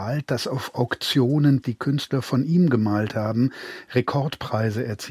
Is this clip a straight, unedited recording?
no; 1 cut; at 1.6 s

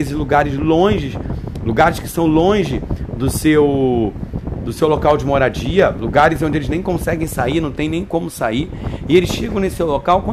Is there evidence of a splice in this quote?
no; 0 cuts

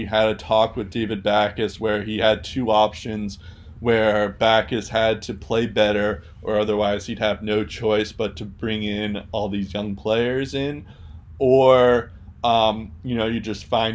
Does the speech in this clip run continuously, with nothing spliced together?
yes; 0 cuts

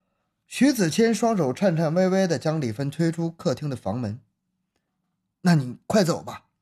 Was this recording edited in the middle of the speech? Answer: no; 0 cuts

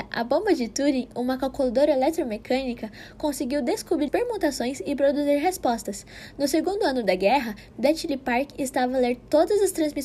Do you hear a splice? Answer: yes; 1 cut; at 4.1 s

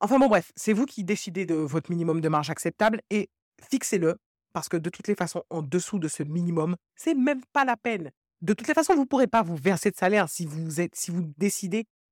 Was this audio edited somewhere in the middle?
no; 0 cuts

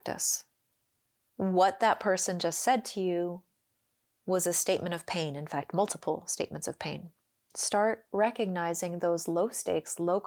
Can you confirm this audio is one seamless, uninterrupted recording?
yes; 0 cuts

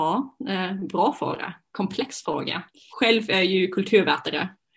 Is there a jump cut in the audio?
no; 0 cuts

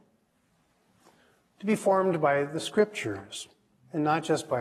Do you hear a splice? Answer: no; 0 cuts

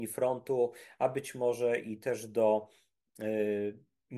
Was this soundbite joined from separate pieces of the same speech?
no; 0 cuts

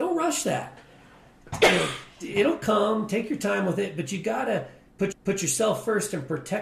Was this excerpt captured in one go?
no; 1 cut; at 5.1 s

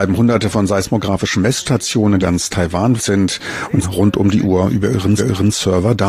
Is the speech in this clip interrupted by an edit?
yes; 4 cuts; at 2.2 s, 3.0 s, 3.8 s, 5.2 s

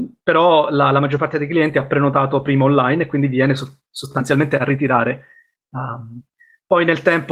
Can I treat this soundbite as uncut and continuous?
yes; 0 cuts

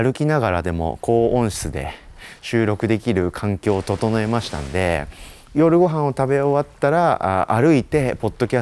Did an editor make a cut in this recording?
yes; 1 cut; at 5.5 s

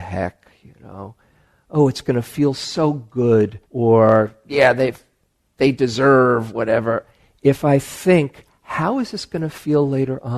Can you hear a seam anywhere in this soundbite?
yes; 1 cut; at 3.6 s

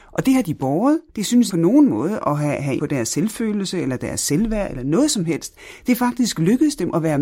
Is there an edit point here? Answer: yes; 3 cuts; at 1.1 s, 1.5 s, 2.8 s

